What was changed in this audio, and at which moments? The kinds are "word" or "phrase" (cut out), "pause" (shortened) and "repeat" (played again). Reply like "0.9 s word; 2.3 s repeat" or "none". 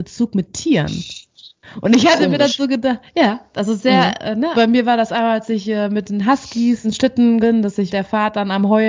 4.5 s word; 6.8 s word; 7.4 s word; 7.9 s word